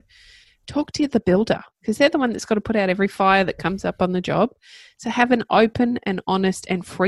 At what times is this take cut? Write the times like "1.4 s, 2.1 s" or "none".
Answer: none

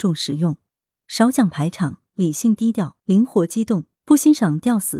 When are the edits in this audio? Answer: 3.0 s, 3.9 s

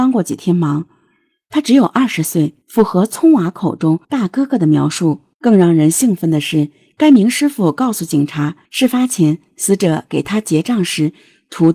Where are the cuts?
2.6 s, 4.0 s, 5.3 s, 8.6 s

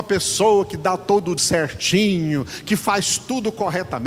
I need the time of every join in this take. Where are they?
1.4 s

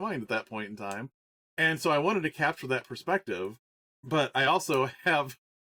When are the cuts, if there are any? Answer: none

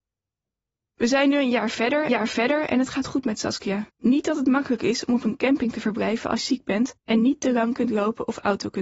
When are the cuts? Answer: 2.1 s, 3.9 s, 6.4 s, 7.0 s

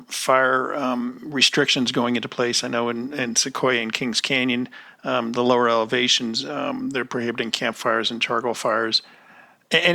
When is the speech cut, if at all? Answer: none

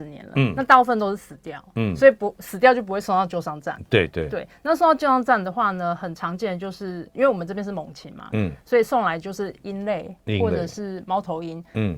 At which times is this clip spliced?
none

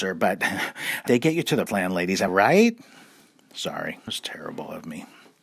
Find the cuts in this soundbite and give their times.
1.1 s, 1.7 s, 2.3 s, 4.1 s

